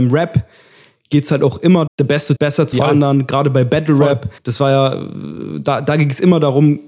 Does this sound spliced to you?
yes; 4 cuts; at 1.9 s, 2.4 s, 2.7 s, 4.4 s

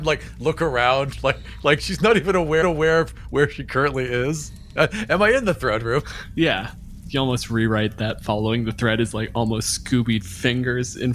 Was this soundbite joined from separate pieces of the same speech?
yes; 2 cuts; at 2.6 s, 10.2 s

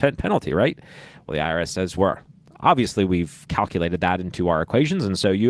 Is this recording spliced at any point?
yes; 1 cut; at 2.0 s

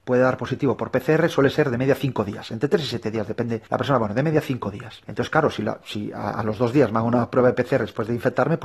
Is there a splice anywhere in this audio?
yes; 2 cuts; at 3.7 s, 5.0 s

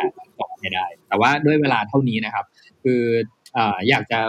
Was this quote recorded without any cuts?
yes; 0 cuts

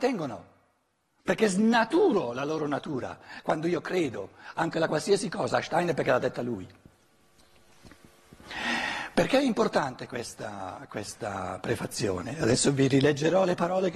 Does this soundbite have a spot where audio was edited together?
no; 0 cuts

